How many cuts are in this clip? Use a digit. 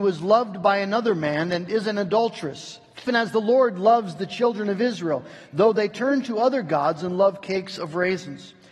1